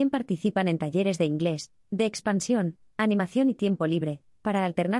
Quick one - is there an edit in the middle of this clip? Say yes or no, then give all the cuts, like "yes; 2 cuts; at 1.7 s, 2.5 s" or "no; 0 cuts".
no; 0 cuts